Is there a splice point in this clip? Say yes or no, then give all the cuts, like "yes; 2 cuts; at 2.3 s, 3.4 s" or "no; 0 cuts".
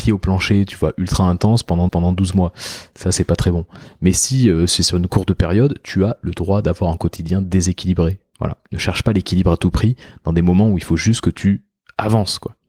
yes; 1 cut; at 1.9 s